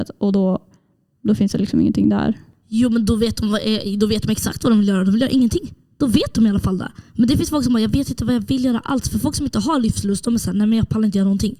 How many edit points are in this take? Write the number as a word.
zero